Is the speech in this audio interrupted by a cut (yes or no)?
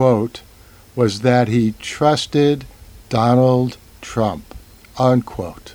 no